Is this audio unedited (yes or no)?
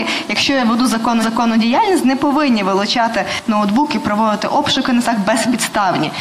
no